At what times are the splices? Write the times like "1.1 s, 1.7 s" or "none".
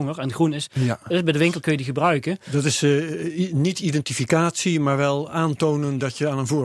none